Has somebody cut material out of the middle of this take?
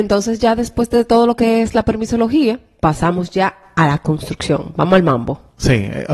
no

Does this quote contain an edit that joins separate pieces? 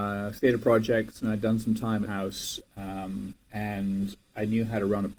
yes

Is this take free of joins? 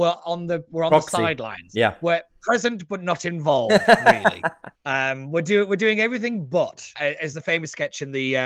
no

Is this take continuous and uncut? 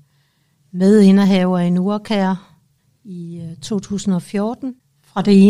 no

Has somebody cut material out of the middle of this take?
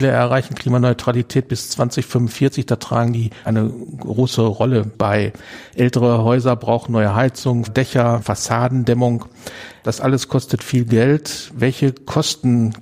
yes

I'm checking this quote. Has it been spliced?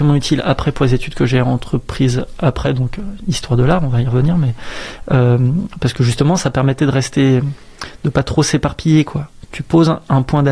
no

